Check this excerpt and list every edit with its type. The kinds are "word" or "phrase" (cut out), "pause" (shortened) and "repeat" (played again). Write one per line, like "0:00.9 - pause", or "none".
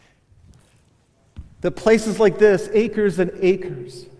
none